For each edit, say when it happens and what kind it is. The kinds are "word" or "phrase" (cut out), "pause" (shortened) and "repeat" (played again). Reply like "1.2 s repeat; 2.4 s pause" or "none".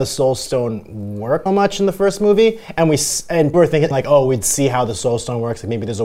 1.5 s word; 3.5 s phrase; 3.9 s word